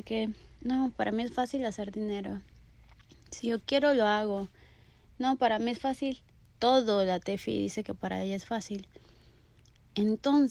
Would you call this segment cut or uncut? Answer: uncut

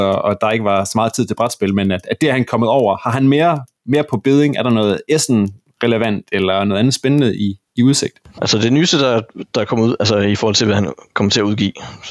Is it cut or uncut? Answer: uncut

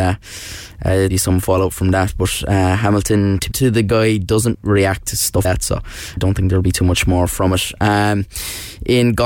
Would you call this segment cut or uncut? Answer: cut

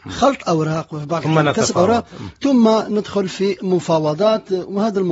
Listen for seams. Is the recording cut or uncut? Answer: uncut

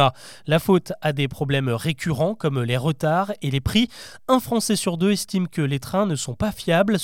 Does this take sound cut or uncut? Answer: uncut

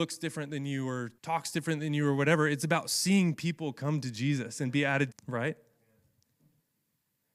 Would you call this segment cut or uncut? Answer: cut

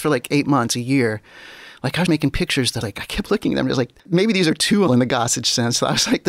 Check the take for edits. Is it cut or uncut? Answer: cut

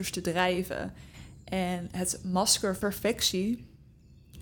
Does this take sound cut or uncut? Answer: cut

